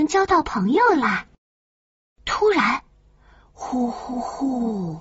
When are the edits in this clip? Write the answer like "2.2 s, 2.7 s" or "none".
none